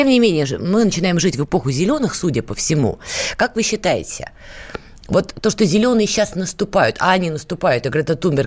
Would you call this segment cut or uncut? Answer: uncut